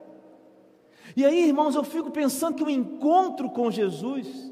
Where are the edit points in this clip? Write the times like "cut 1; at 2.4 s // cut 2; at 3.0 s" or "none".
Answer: cut 1; at 2.5 s